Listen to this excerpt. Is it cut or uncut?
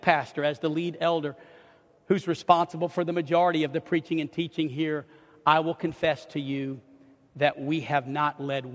uncut